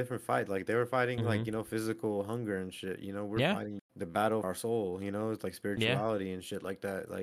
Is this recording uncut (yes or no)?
no